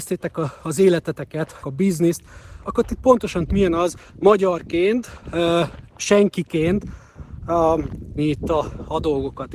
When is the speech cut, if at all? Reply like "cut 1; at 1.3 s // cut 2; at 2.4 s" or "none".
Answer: cut 1; at 1.6 s // cut 2; at 2.6 s // cut 3; at 3.0 s // cut 4; at 3.5 s // cut 5; at 4.1 s // cut 6; at 5.9 s // cut 7; at 8.2 s